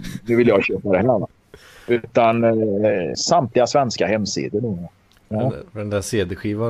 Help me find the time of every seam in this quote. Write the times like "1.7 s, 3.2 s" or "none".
3.1 s